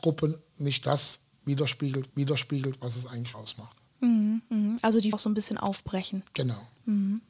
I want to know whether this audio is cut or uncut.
cut